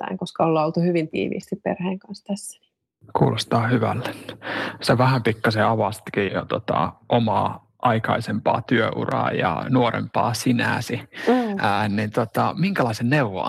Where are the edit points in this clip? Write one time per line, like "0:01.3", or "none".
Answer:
0:06.3